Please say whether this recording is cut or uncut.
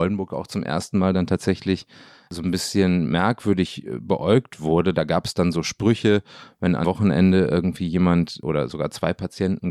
cut